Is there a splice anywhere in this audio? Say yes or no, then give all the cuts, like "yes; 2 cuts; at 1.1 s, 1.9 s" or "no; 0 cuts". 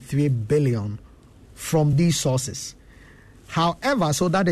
no; 0 cuts